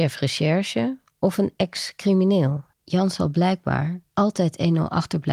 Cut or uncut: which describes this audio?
cut